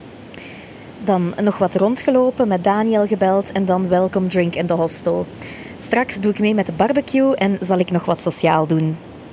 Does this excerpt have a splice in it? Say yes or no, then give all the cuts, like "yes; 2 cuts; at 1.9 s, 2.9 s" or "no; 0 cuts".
no; 0 cuts